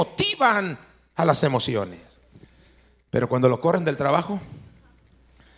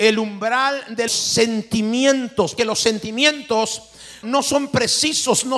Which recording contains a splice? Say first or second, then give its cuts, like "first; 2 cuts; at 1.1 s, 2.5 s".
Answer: second; 3 cuts; at 1.1 s, 2.6 s, 4.2 s